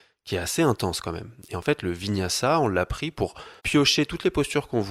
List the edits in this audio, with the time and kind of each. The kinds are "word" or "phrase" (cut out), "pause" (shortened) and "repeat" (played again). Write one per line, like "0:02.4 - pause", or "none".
0:03.6 - pause